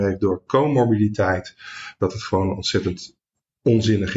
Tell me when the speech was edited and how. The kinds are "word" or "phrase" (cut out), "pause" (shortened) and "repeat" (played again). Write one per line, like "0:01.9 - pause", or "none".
none